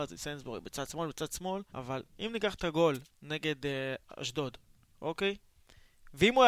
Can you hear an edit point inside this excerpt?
yes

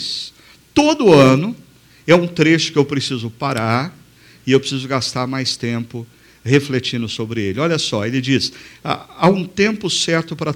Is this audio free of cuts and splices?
yes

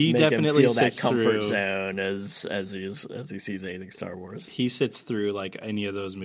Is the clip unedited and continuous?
yes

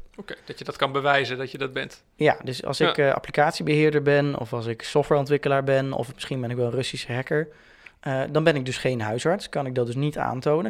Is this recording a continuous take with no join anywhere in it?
yes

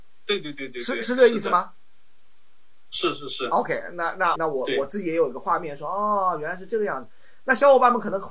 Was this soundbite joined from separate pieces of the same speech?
yes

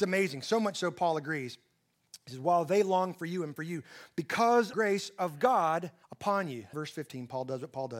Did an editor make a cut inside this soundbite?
yes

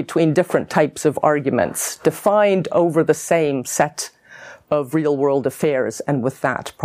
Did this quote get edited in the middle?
no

